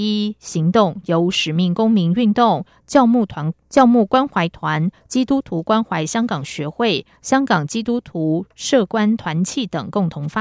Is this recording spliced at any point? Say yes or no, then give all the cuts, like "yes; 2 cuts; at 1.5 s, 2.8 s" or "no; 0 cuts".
yes; 1 cut; at 3.6 s